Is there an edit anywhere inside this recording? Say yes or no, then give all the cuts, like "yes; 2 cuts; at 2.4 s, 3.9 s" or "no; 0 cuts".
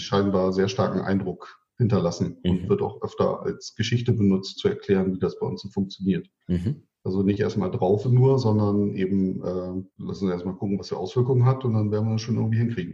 yes; 5 cuts; at 4.6 s, 6.4 s, 8.0 s, 9.9 s, 10.9 s